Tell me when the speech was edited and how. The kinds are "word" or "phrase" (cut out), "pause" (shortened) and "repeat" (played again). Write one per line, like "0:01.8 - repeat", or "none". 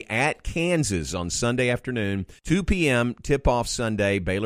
0:02.4 - pause